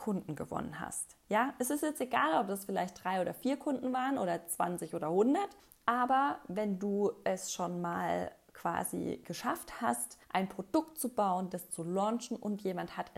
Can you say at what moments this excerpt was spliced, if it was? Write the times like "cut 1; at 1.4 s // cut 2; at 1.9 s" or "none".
cut 1; at 5.6 s // cut 2; at 10.2 s